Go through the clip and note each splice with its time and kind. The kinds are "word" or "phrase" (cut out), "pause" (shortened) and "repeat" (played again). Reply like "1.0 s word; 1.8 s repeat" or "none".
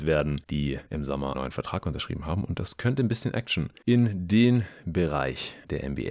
1.3 s word